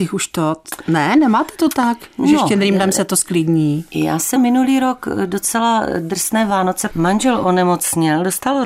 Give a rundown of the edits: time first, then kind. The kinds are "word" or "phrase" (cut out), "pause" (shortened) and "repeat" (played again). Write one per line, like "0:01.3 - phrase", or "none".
0:04.4 - word
0:06.9 - word